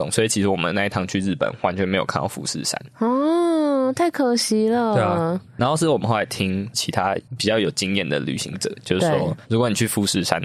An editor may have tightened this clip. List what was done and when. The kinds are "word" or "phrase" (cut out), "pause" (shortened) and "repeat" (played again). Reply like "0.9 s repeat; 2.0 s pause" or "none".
9.4 s pause